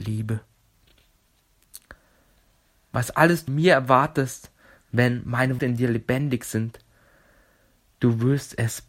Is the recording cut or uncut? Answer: cut